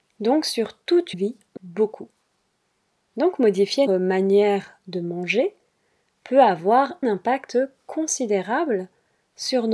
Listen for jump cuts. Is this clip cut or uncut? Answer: cut